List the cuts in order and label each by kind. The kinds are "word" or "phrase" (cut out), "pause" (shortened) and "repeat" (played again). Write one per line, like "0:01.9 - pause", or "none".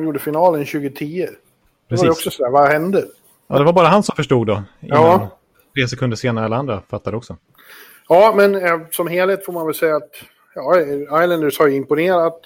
none